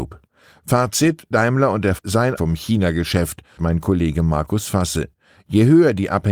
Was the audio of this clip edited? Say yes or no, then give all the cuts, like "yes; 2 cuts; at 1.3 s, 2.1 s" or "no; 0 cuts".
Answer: yes; 4 cuts; at 1.3 s, 2.0 s, 2.4 s, 3.6 s